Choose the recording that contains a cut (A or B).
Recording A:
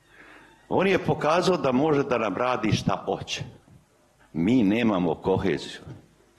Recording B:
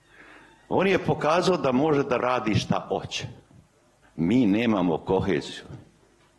B